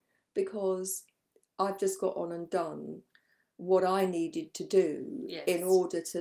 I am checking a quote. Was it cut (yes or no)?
no